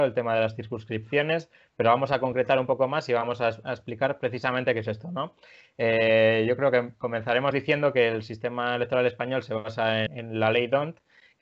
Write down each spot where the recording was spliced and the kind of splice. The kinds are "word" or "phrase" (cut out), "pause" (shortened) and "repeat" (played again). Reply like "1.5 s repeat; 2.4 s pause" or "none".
10.1 s word